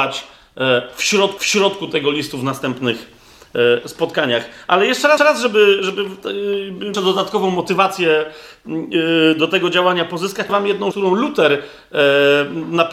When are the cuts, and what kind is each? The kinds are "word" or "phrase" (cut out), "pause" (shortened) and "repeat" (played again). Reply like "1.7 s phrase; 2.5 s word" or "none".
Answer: 1.4 s repeat; 5.2 s repeat; 6.9 s phrase; 10.5 s word; 10.9 s word